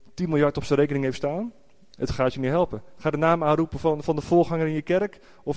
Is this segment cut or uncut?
uncut